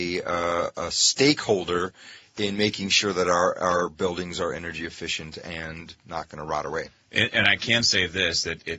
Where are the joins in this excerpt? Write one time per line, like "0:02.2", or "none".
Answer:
none